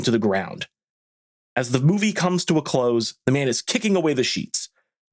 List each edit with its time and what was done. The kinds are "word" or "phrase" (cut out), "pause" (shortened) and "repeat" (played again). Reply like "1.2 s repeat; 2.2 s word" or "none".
none